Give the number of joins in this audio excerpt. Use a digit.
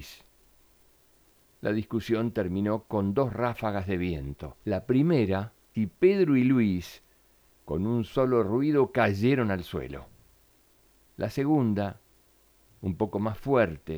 2